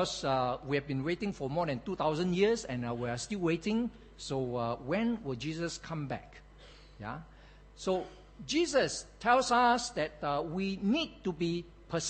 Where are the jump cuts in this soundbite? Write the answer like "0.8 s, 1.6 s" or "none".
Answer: none